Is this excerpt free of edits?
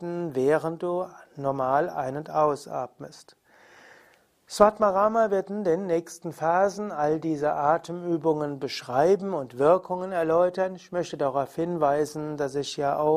yes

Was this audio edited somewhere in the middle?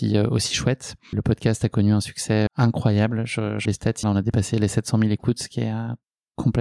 yes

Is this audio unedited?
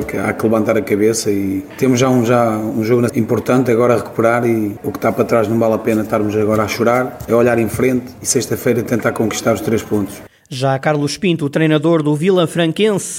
no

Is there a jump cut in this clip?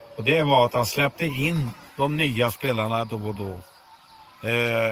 yes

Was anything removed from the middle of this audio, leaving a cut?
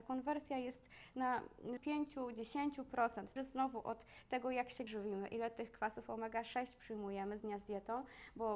yes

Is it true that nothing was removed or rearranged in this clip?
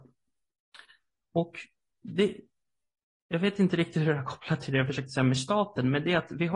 yes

